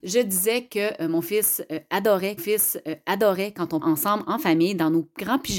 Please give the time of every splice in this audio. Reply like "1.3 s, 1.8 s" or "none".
2.4 s, 3.8 s

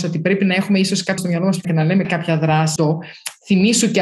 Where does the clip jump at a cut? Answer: 1.2 s, 1.6 s, 2.0 s, 2.8 s

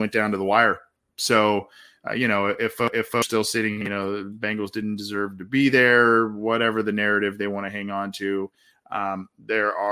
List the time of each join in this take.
none

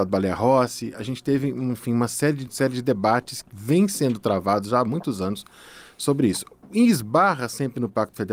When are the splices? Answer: 2.5 s, 3.4 s, 6.6 s

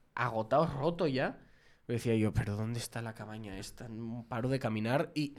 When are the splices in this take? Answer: none

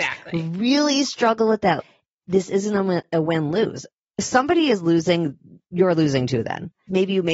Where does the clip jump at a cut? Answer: none

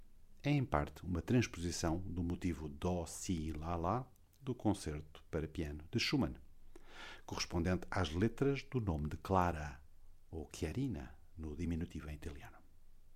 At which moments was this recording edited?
none

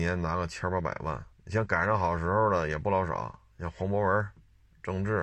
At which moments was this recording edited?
1.3 s, 3.5 s

